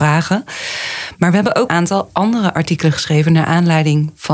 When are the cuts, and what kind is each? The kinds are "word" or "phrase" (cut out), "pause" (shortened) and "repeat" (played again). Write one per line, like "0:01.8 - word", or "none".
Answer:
0:01.7 - word